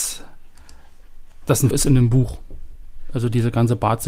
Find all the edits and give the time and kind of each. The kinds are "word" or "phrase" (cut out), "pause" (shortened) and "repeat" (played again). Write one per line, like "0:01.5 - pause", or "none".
0:01.7 - word

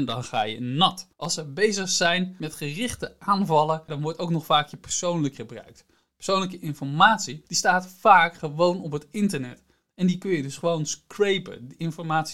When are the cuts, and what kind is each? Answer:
0:01.1 - pause
0:05.3 - word

